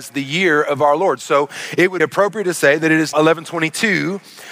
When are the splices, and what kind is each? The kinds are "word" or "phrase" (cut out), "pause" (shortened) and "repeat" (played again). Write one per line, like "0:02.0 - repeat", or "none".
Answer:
0:02.0 - word
0:03.1 - word